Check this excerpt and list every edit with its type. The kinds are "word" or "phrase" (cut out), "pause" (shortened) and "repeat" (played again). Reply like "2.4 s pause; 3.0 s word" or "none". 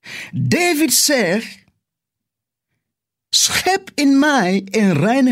none

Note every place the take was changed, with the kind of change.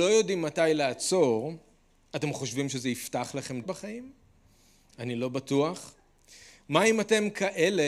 3.6 s word

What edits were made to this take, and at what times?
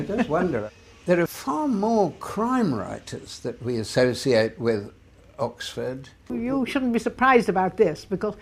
0.9 s pause

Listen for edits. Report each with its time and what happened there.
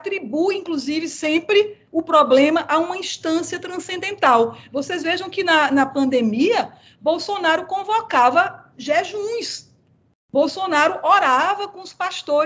1.9 s pause

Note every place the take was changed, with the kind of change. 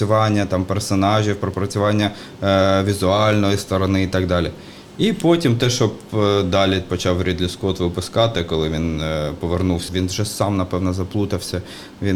9.9 s phrase

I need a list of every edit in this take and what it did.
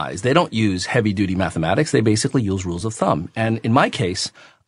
none

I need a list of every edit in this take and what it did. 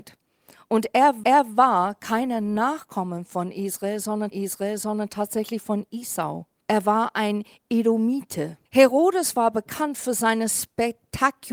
1.2 s repeat; 4.3 s repeat; 6.6 s pause; 8.7 s pause

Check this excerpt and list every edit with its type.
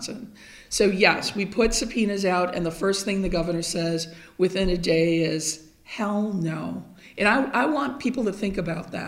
none

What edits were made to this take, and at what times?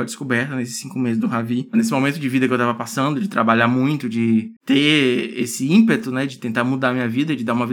4.6 s pause

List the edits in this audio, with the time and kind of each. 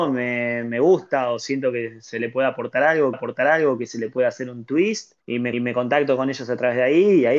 3.1 s repeat; 5.2 s pause; 5.5 s repeat

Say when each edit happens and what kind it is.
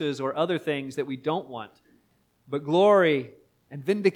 none

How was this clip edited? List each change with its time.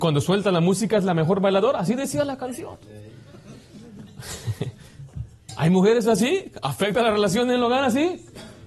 none

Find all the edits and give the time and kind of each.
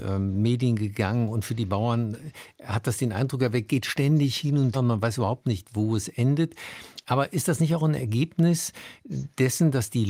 3.7 s word; 4.7 s word

